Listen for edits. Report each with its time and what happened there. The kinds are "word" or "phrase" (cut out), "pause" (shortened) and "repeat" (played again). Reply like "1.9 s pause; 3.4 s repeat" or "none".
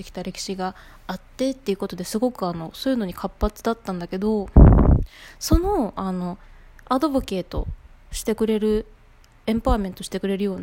none

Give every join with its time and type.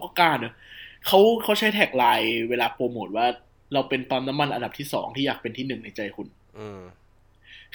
3.5 s pause

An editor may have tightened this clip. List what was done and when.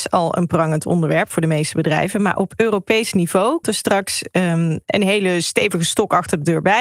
3.6 s word

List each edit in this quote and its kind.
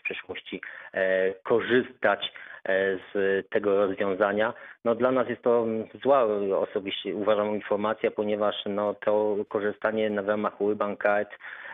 none

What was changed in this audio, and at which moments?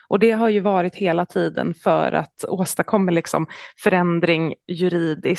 none

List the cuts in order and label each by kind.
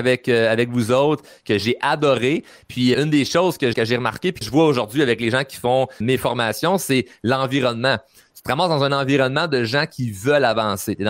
2.9 s word; 3.7 s word; 4.4 s word; 6.0 s word

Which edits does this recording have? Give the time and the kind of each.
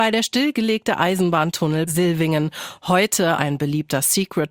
1.9 s word; 3.3 s word

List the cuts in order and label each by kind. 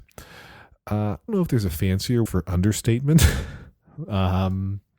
1.3 s phrase; 2.3 s word

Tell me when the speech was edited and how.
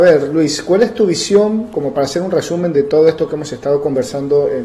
none

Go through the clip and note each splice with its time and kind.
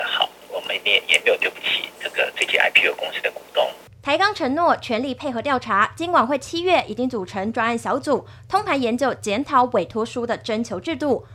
none

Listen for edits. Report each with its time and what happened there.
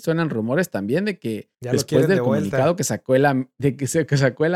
1.5 s pause

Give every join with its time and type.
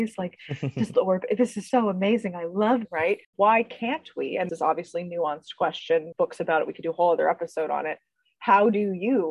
0.9 s word; 1.7 s word; 2.8 s word; 3.2 s pause; 4.5 s word; 6.1 s word

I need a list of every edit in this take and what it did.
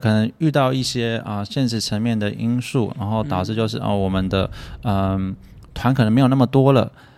none

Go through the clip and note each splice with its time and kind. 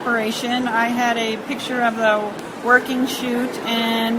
none

